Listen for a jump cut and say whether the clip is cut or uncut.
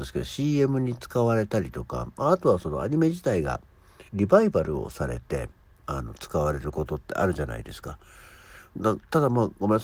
cut